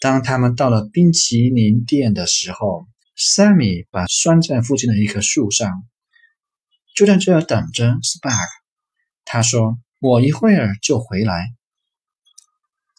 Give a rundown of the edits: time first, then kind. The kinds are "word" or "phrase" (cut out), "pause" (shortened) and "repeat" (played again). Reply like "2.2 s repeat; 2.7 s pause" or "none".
3.0 s pause; 4.1 s word; 9.9 s pause